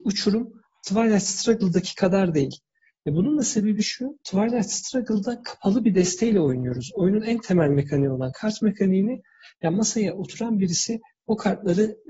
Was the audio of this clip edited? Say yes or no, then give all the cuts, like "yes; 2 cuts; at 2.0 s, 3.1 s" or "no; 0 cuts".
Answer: no; 0 cuts